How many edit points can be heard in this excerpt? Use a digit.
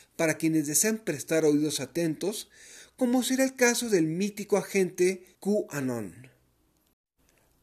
1